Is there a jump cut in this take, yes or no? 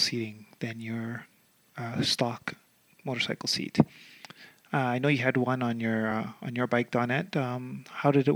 no